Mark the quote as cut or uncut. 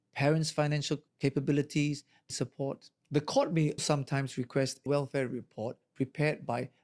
cut